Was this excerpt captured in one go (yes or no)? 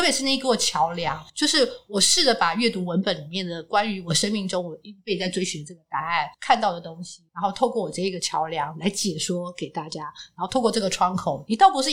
no